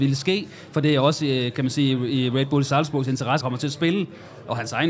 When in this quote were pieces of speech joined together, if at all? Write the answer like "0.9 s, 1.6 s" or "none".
3.4 s